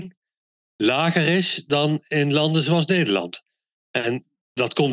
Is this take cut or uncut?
uncut